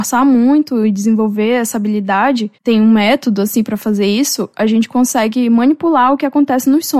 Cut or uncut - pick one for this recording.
cut